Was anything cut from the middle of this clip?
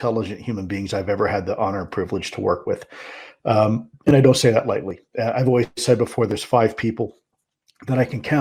no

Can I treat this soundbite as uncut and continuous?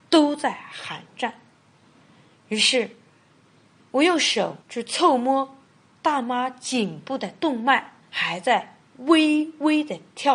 no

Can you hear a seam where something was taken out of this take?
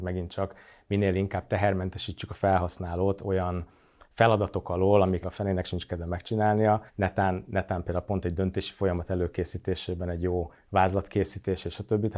yes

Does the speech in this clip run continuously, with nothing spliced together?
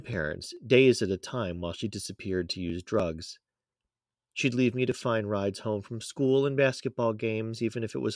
yes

